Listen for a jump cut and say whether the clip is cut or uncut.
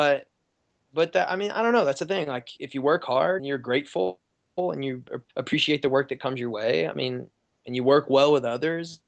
cut